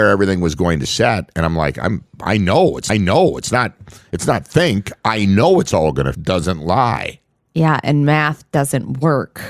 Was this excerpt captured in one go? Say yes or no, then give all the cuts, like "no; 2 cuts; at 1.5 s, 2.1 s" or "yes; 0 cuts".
no; 2 cuts; at 2.9 s, 6.1 s